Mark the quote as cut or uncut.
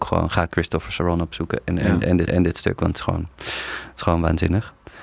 cut